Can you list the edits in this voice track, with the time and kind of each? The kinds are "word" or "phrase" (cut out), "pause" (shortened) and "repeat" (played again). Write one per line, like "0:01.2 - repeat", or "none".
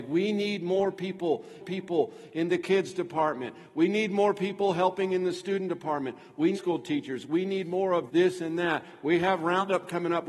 0:01.6 - repeat
0:06.5 - phrase
0:08.1 - word